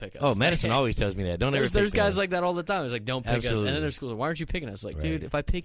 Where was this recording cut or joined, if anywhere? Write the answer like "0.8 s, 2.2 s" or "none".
none

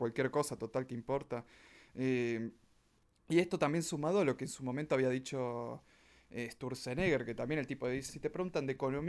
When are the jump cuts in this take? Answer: 8.1 s

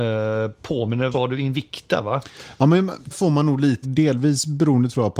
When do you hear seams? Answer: 1.1 s, 3.1 s, 3.8 s

